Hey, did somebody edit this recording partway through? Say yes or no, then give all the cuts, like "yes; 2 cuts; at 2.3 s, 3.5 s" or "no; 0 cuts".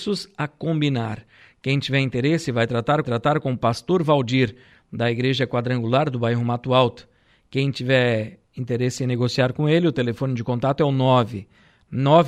yes; 2 cuts; at 3.0 s, 8.5 s